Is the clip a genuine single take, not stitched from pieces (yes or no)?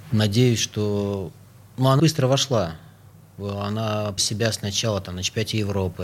no